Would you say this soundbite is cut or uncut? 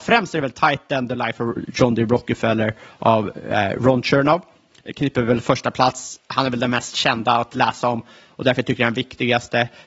uncut